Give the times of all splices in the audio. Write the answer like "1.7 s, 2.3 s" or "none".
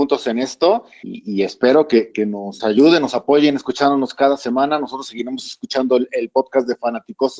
2.1 s, 2.6 s